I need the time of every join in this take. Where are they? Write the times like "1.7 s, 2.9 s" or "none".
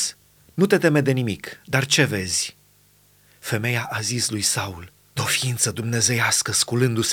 5.2 s